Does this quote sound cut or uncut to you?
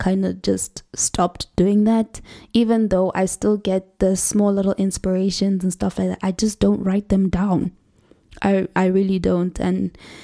uncut